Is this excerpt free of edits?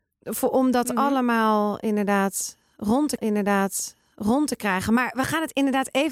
no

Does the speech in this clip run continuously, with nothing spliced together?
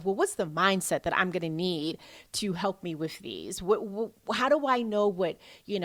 yes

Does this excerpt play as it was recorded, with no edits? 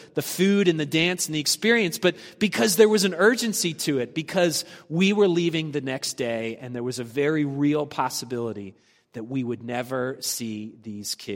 yes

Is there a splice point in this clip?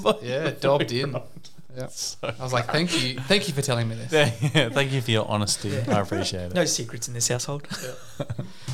no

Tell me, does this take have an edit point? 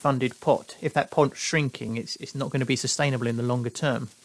no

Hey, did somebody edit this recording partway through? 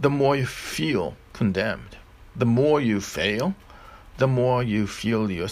yes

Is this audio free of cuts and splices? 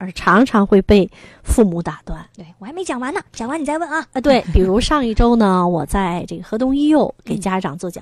yes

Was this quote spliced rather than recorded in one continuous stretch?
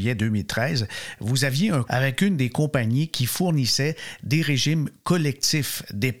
yes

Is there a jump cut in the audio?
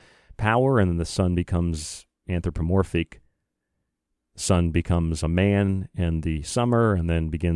no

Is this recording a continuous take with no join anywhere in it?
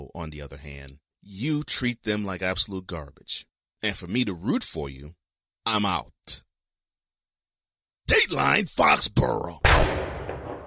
yes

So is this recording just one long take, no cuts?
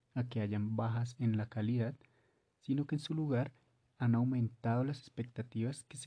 yes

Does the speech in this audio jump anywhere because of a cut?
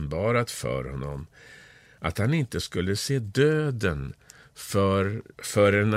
no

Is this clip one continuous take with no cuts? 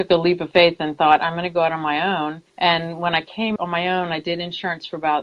no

